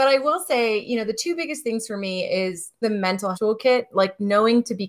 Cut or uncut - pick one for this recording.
cut